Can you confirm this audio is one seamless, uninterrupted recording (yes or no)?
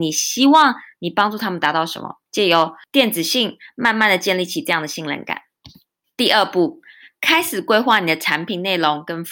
no